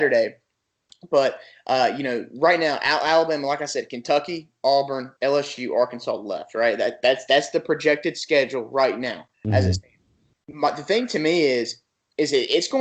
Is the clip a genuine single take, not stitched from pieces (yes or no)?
no